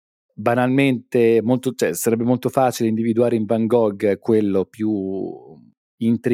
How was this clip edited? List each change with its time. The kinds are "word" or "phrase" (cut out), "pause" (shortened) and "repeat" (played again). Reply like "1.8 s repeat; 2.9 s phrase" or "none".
none